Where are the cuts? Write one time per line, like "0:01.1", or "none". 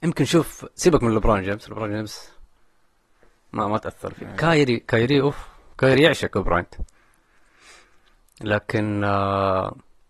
none